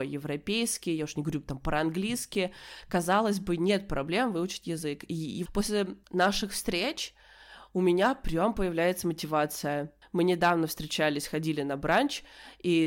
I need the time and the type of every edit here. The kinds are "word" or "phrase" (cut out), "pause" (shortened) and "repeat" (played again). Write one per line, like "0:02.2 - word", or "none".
0:05.5 - word
0:06.0 - pause
0:10.0 - word